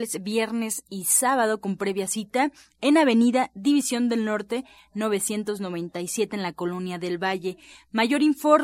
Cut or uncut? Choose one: uncut